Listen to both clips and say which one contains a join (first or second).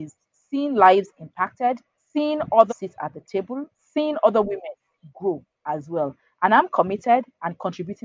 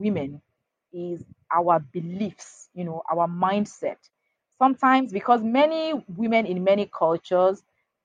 first